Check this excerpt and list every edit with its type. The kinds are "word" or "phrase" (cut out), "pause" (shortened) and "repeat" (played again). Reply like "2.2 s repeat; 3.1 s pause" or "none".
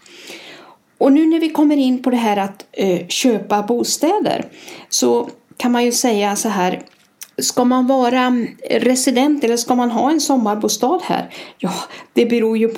7.3 s pause

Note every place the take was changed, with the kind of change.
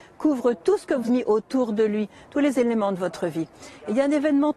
1.1 s word

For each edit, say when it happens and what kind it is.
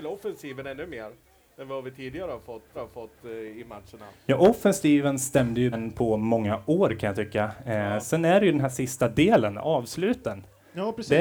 2.7 s repeat; 5.7 s word; 8.7 s word

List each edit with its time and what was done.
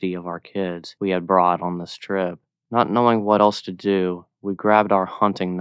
none

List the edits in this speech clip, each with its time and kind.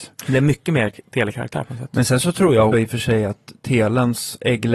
2.7 s word

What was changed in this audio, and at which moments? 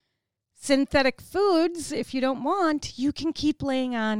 none

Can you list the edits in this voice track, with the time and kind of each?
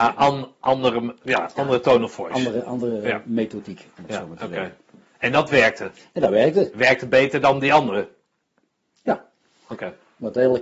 none

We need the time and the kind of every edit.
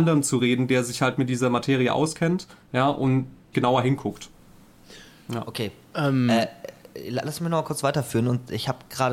3.5 s phrase

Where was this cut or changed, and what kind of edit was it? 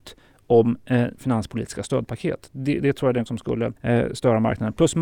1.1 s word; 3.3 s phrase; 3.8 s pause

